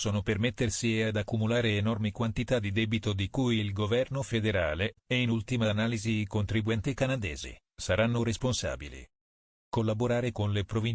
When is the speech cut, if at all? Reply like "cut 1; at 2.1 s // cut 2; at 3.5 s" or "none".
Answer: none